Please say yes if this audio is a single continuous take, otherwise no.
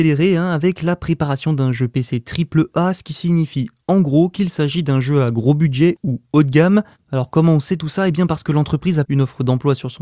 no